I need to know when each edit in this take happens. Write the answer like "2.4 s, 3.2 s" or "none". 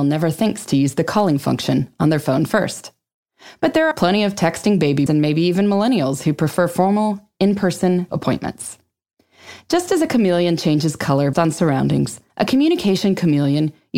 3.9 s, 5.1 s, 8.1 s, 11.3 s, 12.3 s